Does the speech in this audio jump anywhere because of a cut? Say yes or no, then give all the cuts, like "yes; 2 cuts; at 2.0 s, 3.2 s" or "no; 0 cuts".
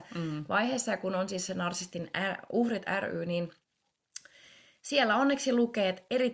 no; 0 cuts